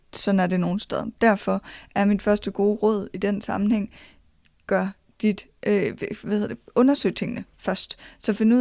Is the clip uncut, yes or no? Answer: yes